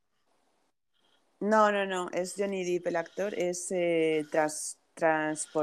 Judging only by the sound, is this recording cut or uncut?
uncut